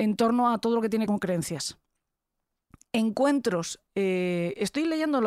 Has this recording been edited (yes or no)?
yes